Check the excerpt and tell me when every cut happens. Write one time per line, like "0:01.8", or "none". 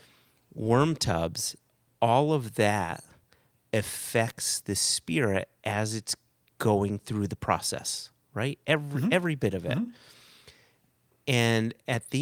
none